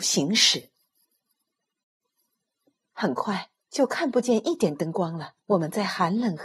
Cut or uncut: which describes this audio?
cut